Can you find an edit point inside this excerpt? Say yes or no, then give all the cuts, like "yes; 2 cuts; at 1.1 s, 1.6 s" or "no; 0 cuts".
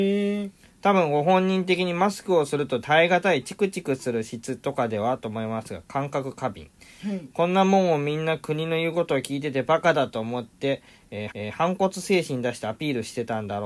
yes; 1 cut; at 11.3 s